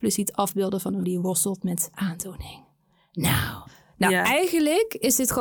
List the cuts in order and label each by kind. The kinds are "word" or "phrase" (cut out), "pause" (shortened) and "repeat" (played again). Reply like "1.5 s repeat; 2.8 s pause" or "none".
1.0 s word; 1.9 s word